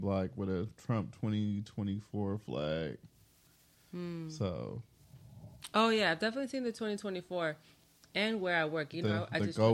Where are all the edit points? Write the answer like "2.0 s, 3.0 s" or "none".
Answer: none